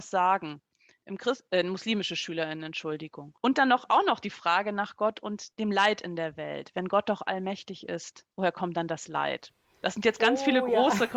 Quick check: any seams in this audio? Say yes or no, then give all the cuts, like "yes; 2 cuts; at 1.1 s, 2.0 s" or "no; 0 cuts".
yes; 3 cuts; at 3.4 s, 5.5 s, 8.3 s